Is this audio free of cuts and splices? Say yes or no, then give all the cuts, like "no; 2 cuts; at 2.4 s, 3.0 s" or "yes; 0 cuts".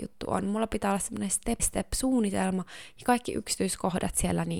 no; 1 cut; at 1.6 s